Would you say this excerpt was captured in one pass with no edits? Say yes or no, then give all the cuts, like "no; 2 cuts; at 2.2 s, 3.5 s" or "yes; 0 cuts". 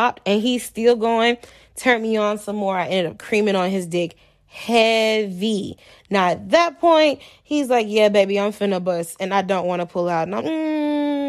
no; 1 cut; at 10.4 s